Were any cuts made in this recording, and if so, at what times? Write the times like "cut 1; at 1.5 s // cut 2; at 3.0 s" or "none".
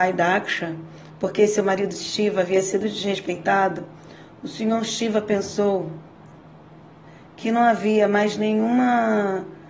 none